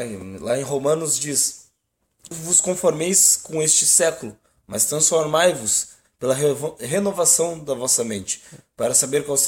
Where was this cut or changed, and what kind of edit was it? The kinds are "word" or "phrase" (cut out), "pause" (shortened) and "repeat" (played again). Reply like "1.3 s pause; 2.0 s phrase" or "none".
2.3 s word